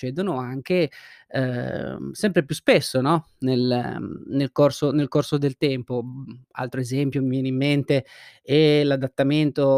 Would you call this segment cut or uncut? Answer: uncut